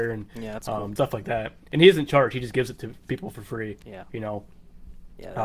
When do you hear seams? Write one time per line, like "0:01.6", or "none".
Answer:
0:01.0